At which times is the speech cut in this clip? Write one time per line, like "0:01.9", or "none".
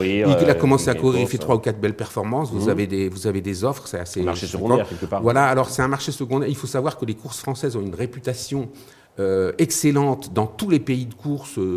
none